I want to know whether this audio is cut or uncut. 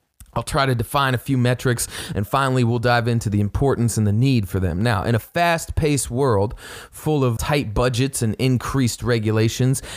cut